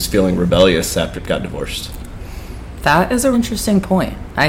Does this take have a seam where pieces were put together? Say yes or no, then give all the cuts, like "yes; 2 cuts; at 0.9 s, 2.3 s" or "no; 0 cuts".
yes; 2 cuts; at 1.2 s, 3.3 s